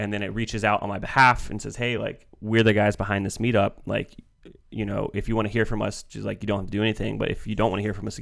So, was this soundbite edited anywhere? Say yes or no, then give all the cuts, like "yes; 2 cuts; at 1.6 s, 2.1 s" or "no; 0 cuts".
no; 0 cuts